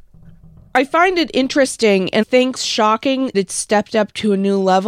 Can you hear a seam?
yes; 3 cuts; at 2.2 s, 2.6 s, 3.3 s

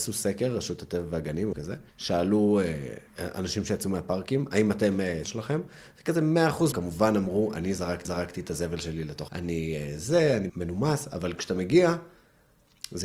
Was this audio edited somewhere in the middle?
yes; 8 cuts; at 1.5 s, 1.9 s, 3.1 s, 5.2 s, 6.7 s, 8.0 s, 9.3 s, 10.5 s

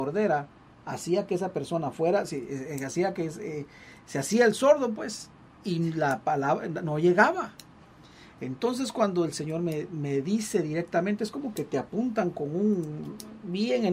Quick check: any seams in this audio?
no; 0 cuts

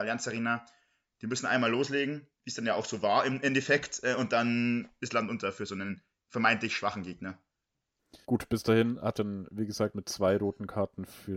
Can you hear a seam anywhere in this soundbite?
yes; 4 cuts; at 2.3 s, 8.2 s, 9.1 s, 9.9 s

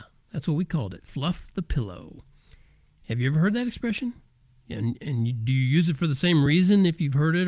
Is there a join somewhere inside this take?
no; 0 cuts

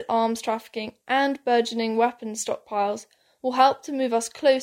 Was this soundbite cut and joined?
no; 0 cuts

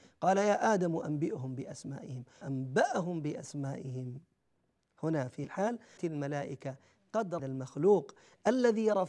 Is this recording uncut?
no; 4 cuts; at 2.4 s, 5.4 s, 6.0 s, 7.4 s

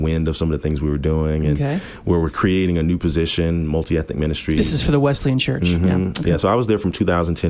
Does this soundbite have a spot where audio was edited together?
no; 0 cuts

